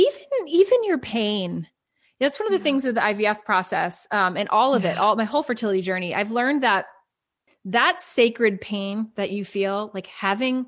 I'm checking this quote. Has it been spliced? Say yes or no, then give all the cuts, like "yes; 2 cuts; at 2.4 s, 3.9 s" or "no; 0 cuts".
no; 0 cuts